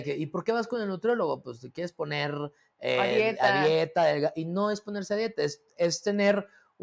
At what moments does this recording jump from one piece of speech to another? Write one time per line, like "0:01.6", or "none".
none